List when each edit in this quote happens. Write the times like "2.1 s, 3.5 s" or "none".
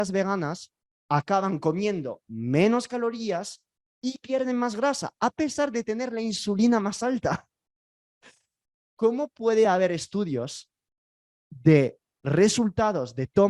none